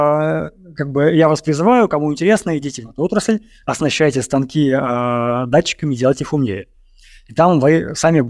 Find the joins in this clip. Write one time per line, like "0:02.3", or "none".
none